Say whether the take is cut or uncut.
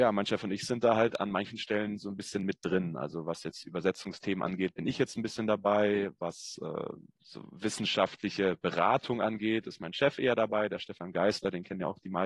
uncut